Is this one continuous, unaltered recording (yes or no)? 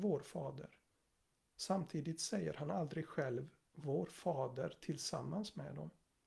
yes